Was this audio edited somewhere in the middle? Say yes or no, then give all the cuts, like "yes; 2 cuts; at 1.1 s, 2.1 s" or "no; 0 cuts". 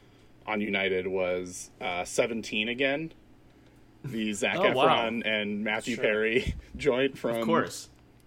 no; 0 cuts